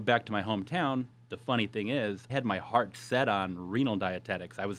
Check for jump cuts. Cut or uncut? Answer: cut